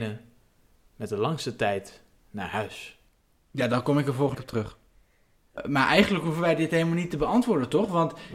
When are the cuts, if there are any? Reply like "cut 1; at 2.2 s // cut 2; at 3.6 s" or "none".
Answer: cut 1; at 4.3 s